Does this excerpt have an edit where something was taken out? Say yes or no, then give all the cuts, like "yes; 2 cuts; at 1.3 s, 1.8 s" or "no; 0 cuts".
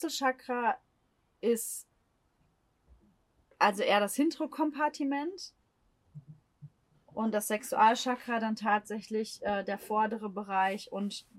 no; 0 cuts